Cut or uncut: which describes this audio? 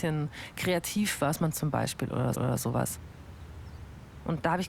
cut